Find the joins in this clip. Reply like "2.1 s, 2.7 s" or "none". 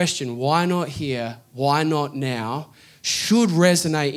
none